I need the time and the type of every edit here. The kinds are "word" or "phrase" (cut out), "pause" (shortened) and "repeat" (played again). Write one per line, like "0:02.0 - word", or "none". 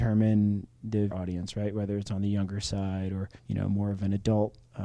0:01.1 - word
0:03.4 - pause